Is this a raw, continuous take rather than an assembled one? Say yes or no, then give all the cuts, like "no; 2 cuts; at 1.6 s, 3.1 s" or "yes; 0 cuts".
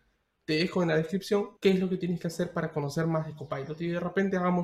no; 1 cut; at 1.6 s